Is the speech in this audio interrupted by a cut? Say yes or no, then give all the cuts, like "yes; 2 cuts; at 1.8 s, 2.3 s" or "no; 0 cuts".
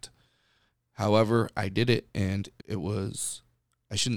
yes; 1 cut; at 2.6 s